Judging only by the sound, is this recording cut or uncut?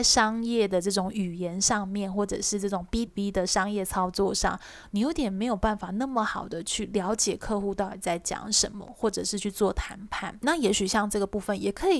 cut